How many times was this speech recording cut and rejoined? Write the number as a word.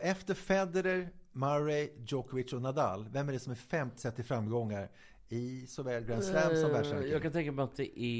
one